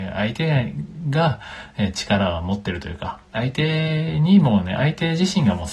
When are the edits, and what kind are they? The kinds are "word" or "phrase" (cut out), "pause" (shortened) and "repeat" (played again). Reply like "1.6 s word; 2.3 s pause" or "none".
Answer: 3.2 s pause